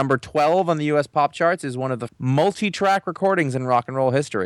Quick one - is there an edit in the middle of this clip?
yes; 1 cut; at 2.1 s

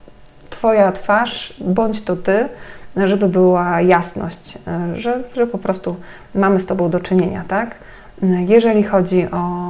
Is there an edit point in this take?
no; 0 cuts

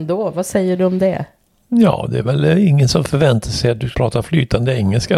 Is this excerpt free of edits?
no; 1 cut; at 3.9 s

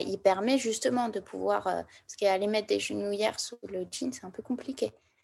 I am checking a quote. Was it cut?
no; 0 cuts

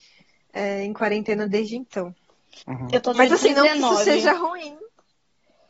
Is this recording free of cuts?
no; 2 cuts; at 2.6 s, 3.1 s

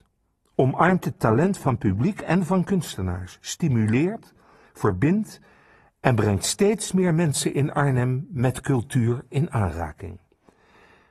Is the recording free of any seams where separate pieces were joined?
yes; 0 cuts

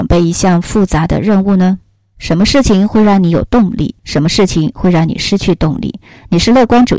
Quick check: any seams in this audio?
yes; 1 cut; at 4.0 s

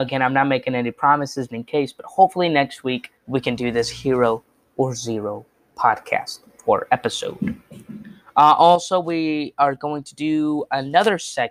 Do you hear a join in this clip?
yes; 2 cuts; at 1.5 s, 3.2 s

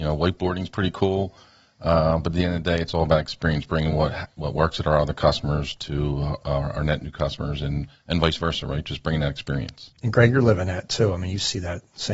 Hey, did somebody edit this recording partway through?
no; 0 cuts

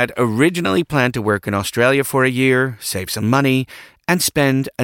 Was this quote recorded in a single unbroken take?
yes; 0 cuts

